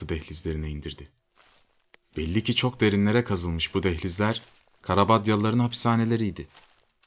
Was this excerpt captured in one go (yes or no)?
yes